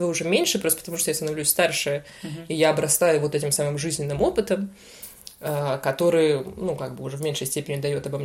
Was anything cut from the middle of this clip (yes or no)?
no